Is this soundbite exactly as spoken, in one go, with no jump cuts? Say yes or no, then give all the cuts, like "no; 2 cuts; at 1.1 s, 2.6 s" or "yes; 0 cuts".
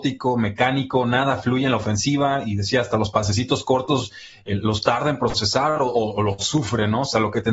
yes; 0 cuts